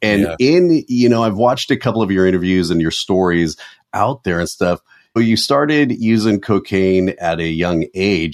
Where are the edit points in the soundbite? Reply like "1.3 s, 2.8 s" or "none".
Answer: 5.2 s